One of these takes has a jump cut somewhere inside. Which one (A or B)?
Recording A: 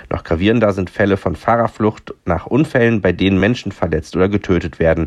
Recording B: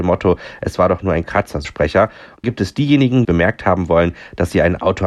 B